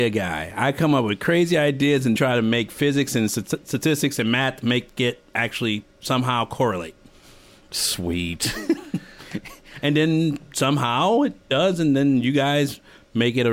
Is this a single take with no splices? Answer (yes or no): no